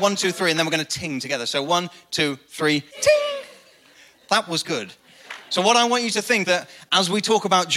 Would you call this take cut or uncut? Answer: cut